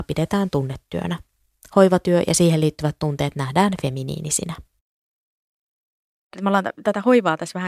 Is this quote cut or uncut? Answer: uncut